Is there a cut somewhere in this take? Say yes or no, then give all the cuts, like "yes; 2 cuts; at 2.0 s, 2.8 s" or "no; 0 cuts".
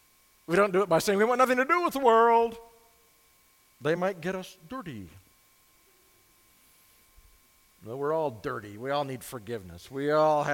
no; 0 cuts